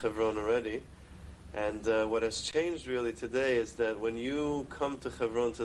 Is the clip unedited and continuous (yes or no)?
yes